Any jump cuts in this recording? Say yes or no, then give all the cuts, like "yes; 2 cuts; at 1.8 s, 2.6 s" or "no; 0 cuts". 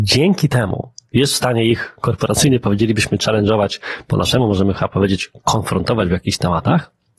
no; 0 cuts